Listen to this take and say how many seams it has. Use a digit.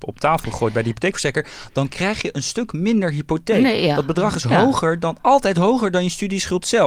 0